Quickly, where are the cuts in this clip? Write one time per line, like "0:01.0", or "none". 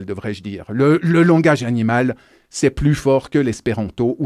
none